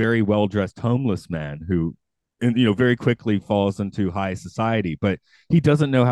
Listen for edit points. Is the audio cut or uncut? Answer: uncut